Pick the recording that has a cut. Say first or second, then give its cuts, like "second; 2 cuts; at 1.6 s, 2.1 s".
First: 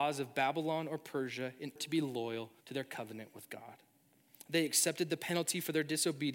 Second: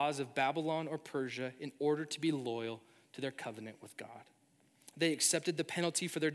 first; 2 cuts; at 1.8 s, 2.6 s